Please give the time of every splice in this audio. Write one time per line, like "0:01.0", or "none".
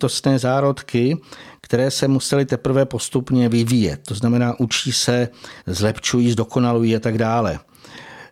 0:05.6

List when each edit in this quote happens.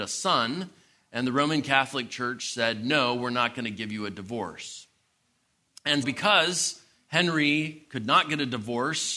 0:06.0

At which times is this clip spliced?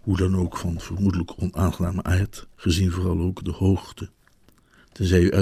0:02.5

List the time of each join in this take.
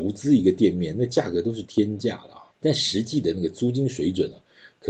0:02.5

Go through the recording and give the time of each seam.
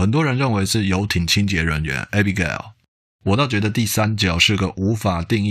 none

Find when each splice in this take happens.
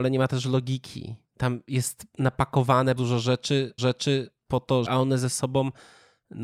0:01.3
0:03.0
0:03.8
0:04.9

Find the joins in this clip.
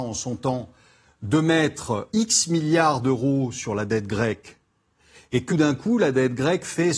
0:02.1
0:05.5

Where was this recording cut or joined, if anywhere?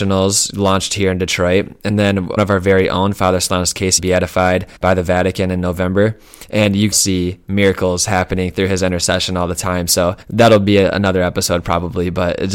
0:02.4
0:04.0
0:04.8
0:06.9
0:10.2

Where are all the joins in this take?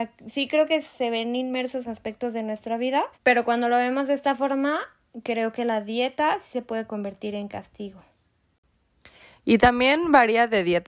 0:01.8
0:03.1

